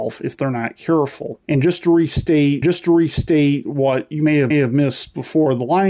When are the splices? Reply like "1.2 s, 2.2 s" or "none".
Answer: 1.4 s, 2.6 s, 4.5 s